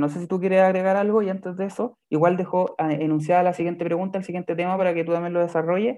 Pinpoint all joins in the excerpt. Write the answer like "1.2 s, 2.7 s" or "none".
none